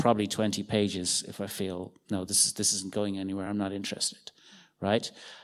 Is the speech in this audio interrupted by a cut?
no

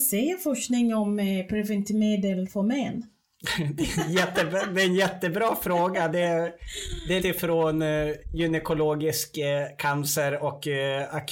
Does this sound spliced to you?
yes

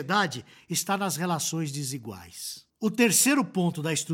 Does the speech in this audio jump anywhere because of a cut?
yes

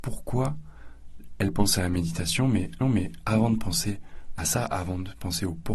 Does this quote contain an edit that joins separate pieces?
yes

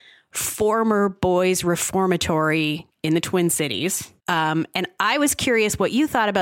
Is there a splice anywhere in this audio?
yes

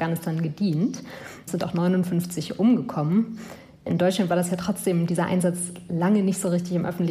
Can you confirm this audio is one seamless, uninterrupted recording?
yes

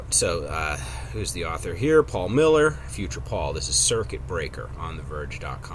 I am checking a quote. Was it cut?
yes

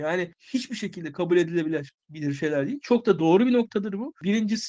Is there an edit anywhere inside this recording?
no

